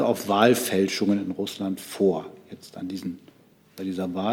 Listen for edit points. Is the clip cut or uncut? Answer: uncut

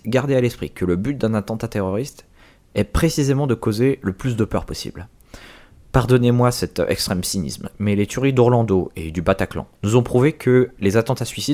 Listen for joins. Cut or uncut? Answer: cut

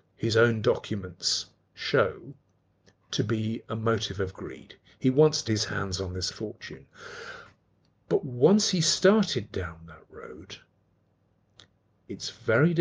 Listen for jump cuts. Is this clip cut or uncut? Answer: cut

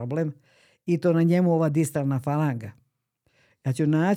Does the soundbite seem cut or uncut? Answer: uncut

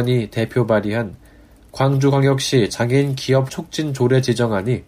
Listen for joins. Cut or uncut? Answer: cut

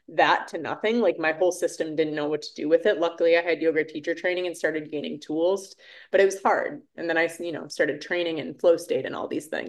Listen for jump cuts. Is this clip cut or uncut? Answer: uncut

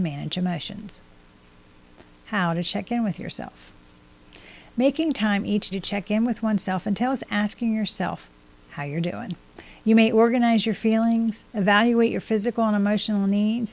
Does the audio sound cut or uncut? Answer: cut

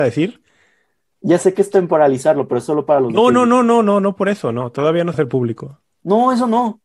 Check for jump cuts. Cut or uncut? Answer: cut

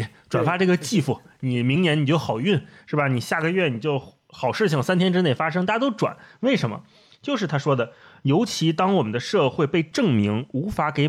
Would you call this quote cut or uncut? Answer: uncut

